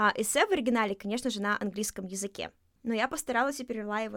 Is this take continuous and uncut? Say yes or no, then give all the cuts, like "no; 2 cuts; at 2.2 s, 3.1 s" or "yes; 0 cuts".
yes; 0 cuts